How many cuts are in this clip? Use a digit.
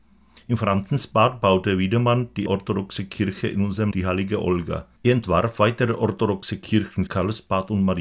4